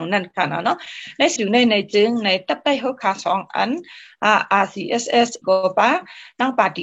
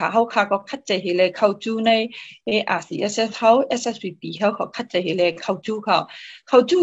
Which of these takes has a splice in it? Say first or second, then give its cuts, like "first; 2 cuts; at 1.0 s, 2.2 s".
first; 2 cuts; at 1.4 s, 5.4 s